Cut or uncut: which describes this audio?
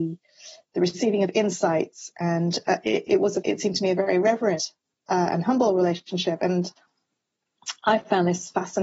cut